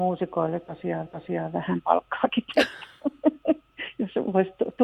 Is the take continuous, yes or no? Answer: no